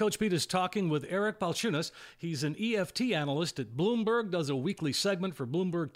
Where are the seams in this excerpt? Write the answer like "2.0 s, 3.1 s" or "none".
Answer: none